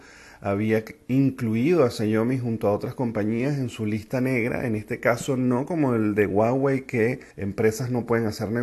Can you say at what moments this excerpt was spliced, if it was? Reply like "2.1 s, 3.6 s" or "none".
7.3 s